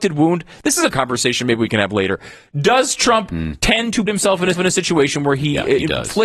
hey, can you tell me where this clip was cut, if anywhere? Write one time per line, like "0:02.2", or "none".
0:00.9
0:04.1
0:04.5